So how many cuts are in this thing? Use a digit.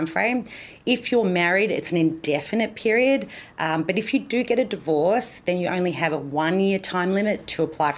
0